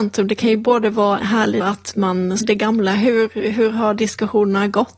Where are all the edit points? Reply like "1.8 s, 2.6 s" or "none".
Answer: 1.2 s, 1.6 s, 2.4 s